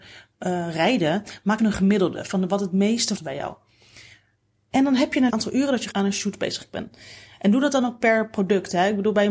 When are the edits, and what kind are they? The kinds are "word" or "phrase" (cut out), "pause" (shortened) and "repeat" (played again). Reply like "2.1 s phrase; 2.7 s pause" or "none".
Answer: 1.6 s word; 3.1 s word; 5.3 s phrase; 5.9 s word